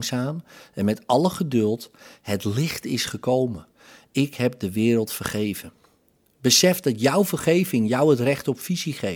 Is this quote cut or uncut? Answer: uncut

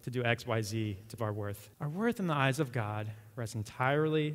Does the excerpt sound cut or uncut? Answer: cut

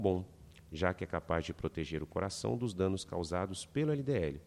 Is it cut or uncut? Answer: uncut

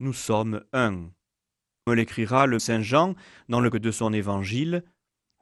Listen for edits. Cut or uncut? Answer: cut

